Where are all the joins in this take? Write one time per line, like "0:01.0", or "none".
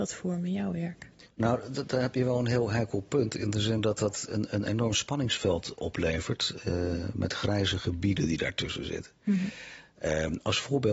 0:01.3